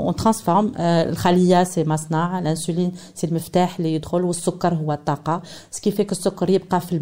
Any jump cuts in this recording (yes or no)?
no